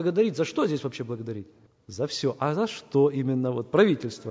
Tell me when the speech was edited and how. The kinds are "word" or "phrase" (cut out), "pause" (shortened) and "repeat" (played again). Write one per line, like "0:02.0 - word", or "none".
none